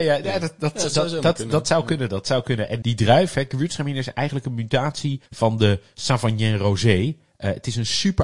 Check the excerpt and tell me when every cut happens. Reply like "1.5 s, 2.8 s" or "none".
2.8 s, 5.3 s